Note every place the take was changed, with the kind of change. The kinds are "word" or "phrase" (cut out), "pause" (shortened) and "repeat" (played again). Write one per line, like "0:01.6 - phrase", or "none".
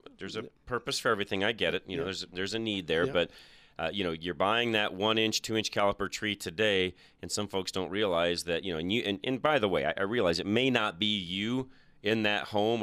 none